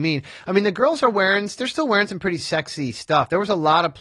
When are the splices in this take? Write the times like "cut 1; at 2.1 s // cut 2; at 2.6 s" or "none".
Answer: none